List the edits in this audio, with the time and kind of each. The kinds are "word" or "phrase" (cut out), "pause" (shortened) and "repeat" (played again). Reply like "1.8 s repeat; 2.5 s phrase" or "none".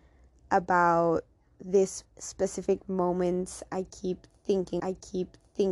2.1 s pause; 4.8 s repeat